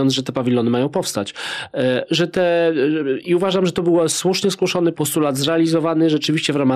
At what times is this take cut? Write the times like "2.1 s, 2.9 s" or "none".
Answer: 4.9 s